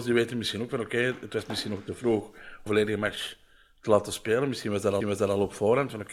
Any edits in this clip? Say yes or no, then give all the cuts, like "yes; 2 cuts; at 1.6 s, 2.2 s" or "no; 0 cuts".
yes; 2 cuts; at 2.7 s, 5.0 s